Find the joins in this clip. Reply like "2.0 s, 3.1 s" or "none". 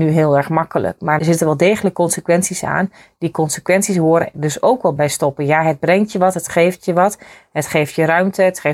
1.2 s, 4.3 s, 5.0 s